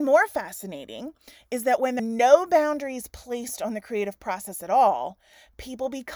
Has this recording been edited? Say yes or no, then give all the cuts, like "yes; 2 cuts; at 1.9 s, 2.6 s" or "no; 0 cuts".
yes; 1 cut; at 2.0 s